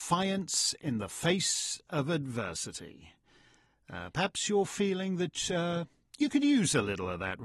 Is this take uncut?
yes; 0 cuts

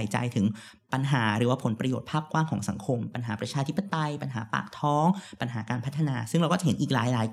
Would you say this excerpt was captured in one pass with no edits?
yes; 0 cuts

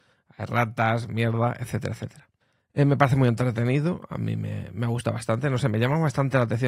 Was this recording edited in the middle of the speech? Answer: yes; 1 cut; at 2.4 s

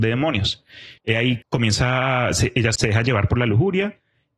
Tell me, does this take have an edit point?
yes; 3 cuts; at 1.0 s, 1.4 s, 2.7 s

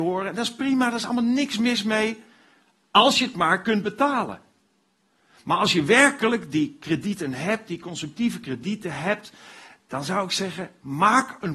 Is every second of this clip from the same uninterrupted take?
yes; 0 cuts

